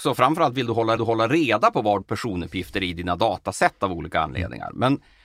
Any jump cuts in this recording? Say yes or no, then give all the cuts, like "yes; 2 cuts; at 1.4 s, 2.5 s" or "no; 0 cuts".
yes; 2 cuts; at 1.0 s, 2.0 s